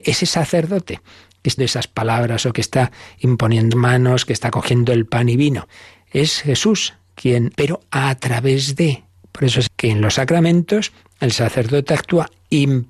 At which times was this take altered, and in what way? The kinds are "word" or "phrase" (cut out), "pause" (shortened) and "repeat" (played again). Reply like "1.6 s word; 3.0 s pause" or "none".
1.6 s word; 3.7 s word; 7.5 s word; 9.7 s word